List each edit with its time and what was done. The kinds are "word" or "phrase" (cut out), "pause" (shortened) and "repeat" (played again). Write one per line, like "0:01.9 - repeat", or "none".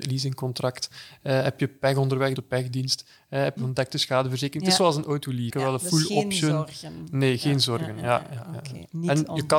0:02.3 - phrase
0:03.6 - phrase
0:05.5 - phrase

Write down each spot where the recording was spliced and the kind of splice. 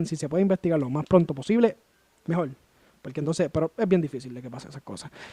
none

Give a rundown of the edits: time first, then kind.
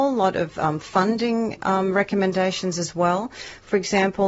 none

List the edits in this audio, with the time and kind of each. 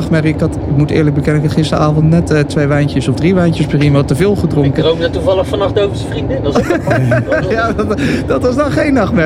none

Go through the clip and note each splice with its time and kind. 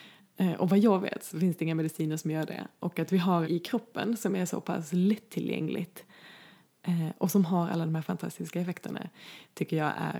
0:03.4 - phrase

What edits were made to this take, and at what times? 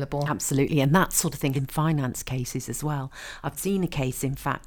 0:01.5 - word
0:03.6 - word

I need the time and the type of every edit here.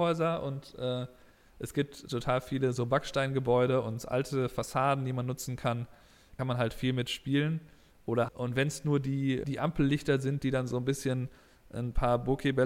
0:06.4 - word
0:08.3 - word
0:09.4 - word

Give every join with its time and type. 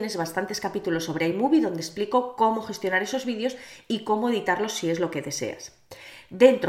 none

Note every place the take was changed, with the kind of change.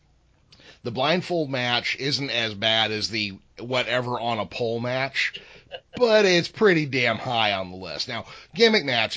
none

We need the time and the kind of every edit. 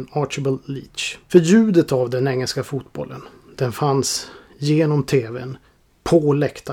none

